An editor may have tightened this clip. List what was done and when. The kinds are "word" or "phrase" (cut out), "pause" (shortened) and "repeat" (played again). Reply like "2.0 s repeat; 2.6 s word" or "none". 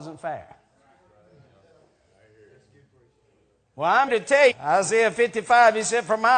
4.1 s word; 4.5 s word

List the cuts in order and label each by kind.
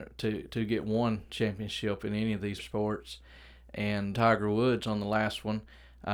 2.6 s word; 4.1 s phrase

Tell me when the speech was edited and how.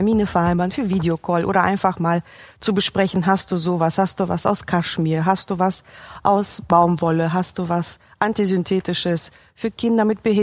none

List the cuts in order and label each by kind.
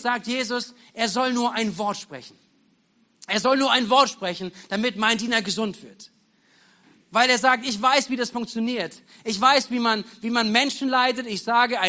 none

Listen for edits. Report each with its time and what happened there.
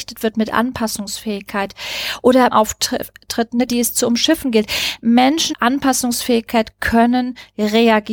2.5 s phrase; 3.7 s word; 5.5 s word

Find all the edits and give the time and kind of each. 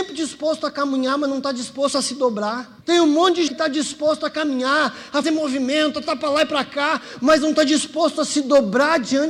2.8 s pause; 3.5 s word; 5.2 s word

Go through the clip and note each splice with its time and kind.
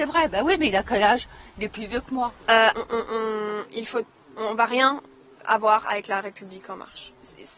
2.7 s word

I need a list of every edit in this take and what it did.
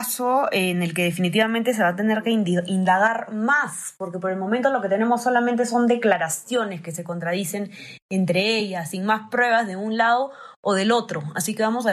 none

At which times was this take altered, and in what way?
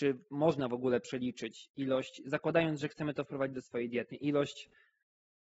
4.1 s word

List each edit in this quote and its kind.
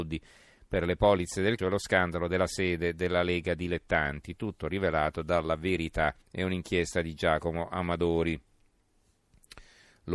1.6 s word; 6.2 s pause

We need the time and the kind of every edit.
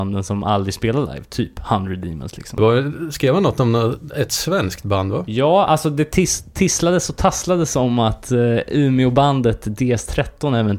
none

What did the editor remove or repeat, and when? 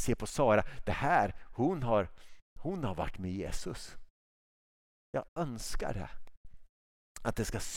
2.5 s pause; 5.3 s pause

